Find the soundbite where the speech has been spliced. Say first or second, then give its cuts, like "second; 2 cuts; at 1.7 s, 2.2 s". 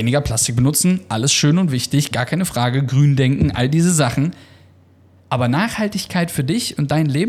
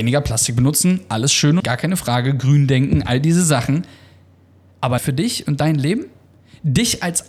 second; 2 cuts; at 1.6 s, 5.0 s